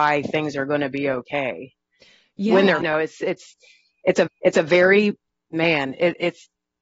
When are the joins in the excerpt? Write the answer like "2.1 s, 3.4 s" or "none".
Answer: 2.8 s, 4.3 s